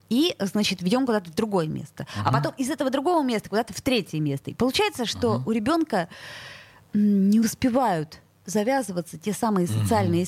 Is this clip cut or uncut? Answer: uncut